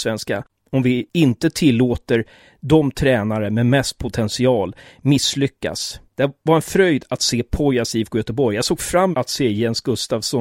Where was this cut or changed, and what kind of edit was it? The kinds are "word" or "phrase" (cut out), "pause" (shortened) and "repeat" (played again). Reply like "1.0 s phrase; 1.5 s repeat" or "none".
6.1 s pause; 9.1 s word